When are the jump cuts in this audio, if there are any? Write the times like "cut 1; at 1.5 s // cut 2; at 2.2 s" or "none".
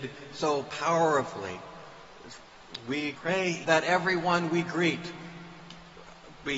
cut 1; at 3.1 s // cut 2; at 3.6 s